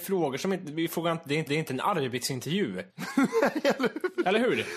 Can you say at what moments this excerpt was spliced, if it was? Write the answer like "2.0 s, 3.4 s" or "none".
1.5 s, 2.9 s

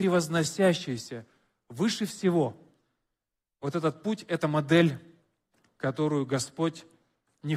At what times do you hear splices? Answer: none

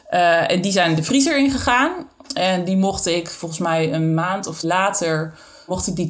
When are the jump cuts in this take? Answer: 4.6 s

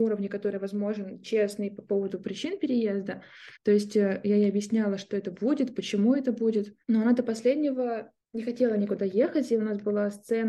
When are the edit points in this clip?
3.6 s, 6.8 s, 8.2 s

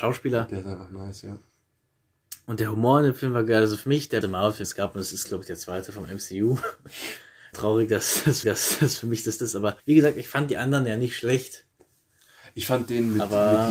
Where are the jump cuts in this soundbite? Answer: 4.2 s, 4.6 s, 7.5 s, 8.4 s, 9.4 s, 9.8 s

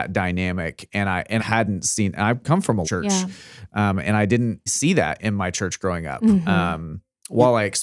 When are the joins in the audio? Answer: 1.4 s, 2.8 s, 4.7 s, 5.2 s

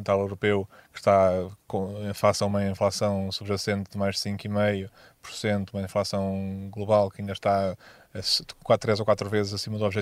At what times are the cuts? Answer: none

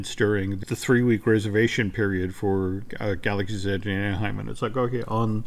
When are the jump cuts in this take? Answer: none

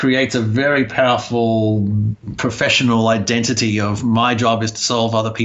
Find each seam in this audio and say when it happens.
none

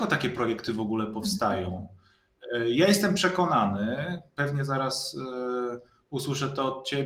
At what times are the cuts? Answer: none

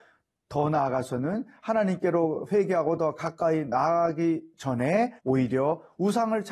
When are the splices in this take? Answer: 5.2 s

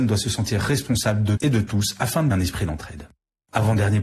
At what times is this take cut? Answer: 1.4 s, 2.3 s

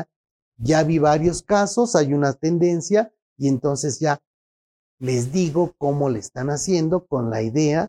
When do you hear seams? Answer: none

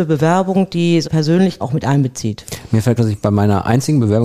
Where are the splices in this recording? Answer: 1.0 s, 1.6 s, 3.0 s

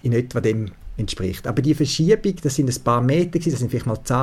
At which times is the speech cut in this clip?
none

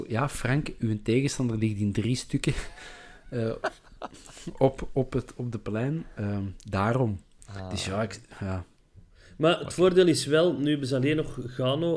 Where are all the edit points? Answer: none

